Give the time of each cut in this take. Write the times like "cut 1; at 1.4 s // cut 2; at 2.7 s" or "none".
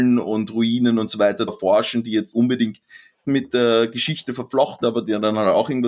cut 1; at 1.5 s // cut 2; at 2.3 s // cut 3; at 3.2 s // cut 4; at 4.8 s